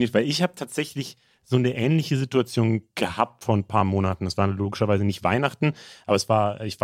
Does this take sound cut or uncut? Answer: uncut